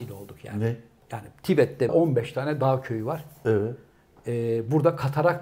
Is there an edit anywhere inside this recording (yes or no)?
yes